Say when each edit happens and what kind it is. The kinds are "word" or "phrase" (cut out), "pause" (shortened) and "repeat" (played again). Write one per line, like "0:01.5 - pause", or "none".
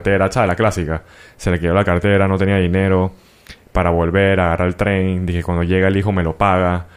none